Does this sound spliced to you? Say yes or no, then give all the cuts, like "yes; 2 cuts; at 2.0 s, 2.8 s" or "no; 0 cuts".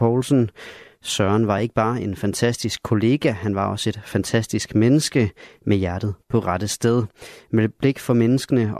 no; 0 cuts